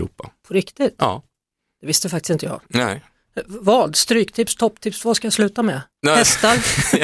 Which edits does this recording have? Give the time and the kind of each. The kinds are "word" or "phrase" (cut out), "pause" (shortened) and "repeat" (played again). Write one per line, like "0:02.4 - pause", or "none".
none